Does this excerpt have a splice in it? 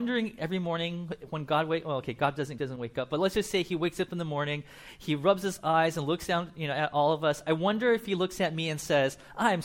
yes; 1 cut; at 2.6 s

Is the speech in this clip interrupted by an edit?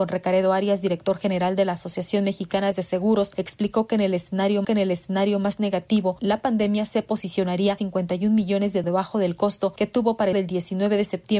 yes; 5 cuts; at 2.7 s, 4.6 s, 7.8 s, 8.8 s, 10.3 s

